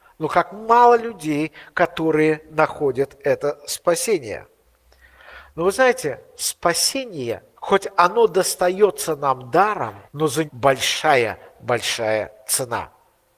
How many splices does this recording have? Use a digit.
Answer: 3